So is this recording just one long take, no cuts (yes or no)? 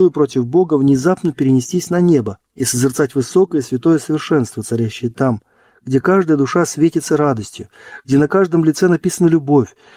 yes